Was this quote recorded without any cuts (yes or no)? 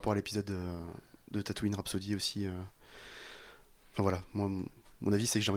yes